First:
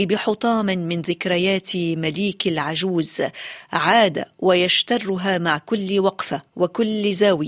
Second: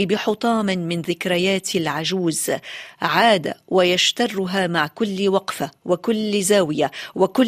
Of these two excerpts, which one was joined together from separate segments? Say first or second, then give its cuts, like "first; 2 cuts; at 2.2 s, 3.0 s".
second; 1 cut; at 1.7 s